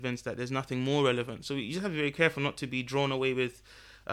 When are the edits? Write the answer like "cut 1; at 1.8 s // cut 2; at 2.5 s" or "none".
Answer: none